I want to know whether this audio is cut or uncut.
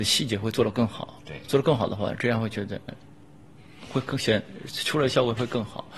cut